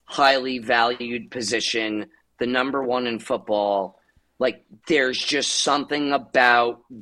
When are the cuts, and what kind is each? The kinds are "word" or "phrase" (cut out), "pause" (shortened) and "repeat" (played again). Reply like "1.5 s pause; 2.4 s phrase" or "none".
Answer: none